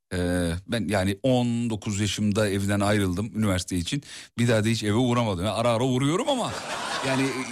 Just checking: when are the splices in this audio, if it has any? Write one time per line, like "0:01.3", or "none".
none